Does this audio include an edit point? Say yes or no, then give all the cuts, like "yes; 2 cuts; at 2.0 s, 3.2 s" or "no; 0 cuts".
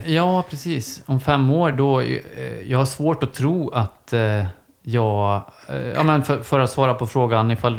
no; 0 cuts